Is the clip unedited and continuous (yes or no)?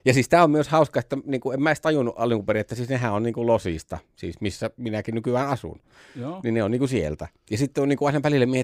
yes